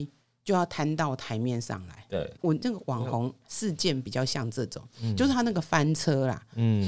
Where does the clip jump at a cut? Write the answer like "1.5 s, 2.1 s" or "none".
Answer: 2.4 s